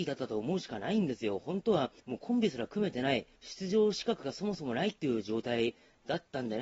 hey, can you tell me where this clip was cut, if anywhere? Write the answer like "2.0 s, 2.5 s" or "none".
2.0 s, 3.4 s